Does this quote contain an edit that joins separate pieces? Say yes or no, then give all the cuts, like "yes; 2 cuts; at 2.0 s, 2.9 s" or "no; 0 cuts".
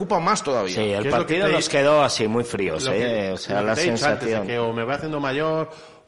no; 0 cuts